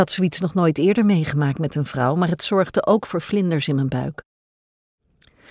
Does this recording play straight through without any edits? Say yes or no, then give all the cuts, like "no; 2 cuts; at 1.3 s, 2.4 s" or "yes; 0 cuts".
yes; 0 cuts